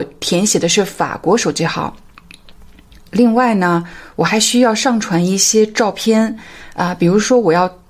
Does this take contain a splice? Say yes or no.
no